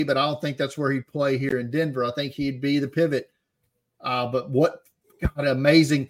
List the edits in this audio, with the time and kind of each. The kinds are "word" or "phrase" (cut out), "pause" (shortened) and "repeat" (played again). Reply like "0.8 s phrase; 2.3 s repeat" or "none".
none